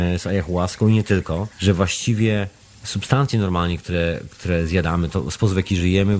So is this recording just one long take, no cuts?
no; 2 cuts; at 1.5 s, 2.6 s

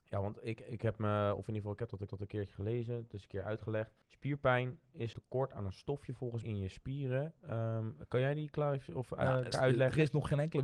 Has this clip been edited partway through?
yes; 5 cuts; at 2.1 s, 4.0 s, 5.1 s, 6.4 s, 9.5 s

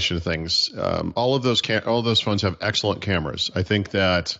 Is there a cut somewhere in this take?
no; 0 cuts

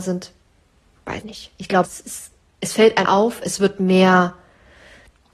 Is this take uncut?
no; 3 cuts; at 1.2 s, 1.8 s, 3.1 s

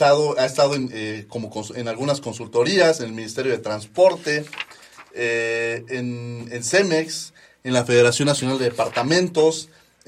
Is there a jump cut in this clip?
no; 0 cuts

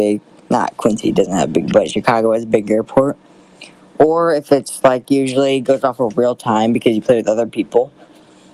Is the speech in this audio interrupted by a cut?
no; 0 cuts

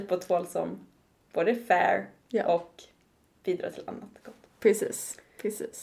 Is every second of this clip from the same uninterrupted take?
yes; 0 cuts

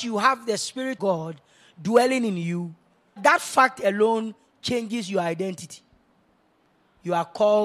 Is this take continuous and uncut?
no; 2 cuts; at 1.0 s, 3.2 s

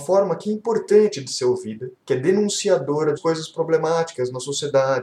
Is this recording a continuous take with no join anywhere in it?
no; 2 cuts; at 1.9 s, 3.2 s

